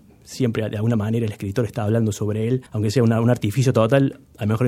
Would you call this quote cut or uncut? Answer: cut